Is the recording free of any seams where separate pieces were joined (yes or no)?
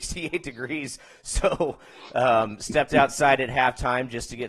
yes